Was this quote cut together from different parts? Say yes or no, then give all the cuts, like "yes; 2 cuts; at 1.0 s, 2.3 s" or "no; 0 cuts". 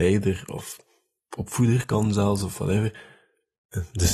no; 0 cuts